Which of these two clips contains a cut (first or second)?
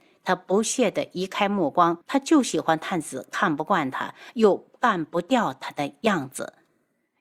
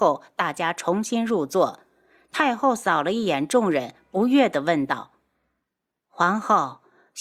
first